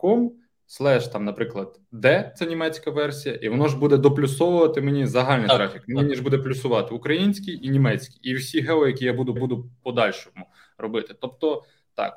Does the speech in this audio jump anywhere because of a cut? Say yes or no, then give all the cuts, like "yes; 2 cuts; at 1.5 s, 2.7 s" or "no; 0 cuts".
yes; 1 cut; at 9.4 s